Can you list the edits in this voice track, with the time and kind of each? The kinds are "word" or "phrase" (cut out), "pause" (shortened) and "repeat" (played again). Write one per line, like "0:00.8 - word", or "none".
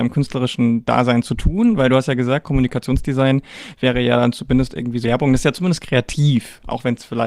0:05.0 - word